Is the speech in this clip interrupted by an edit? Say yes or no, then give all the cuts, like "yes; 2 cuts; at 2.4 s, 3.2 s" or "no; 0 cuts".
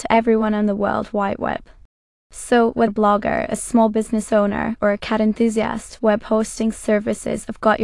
yes; 1 cut; at 2.9 s